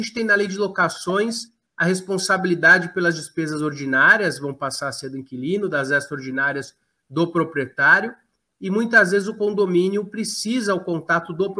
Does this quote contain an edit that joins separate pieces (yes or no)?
no